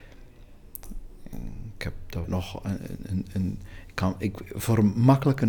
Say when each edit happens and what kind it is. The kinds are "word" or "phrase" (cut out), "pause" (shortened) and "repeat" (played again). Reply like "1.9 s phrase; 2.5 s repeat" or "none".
2.2 s word